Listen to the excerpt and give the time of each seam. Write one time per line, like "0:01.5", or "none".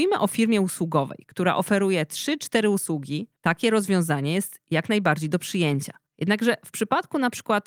0:03.4
0:06.1